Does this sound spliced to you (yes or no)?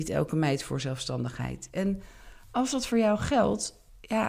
no